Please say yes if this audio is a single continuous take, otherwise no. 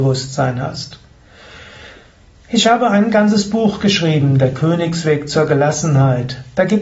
yes